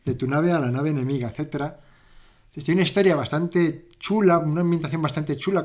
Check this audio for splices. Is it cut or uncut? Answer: uncut